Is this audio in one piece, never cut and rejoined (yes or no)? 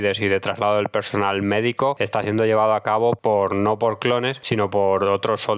yes